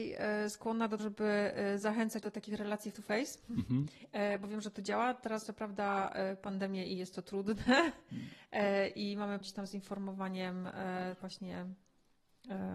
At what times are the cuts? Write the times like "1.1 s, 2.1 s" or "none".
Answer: 1.0 s, 2.2 s, 2.9 s, 5.4 s, 9.4 s, 11.2 s